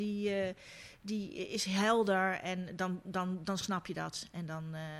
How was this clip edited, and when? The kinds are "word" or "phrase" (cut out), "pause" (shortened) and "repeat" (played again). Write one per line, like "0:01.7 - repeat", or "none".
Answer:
none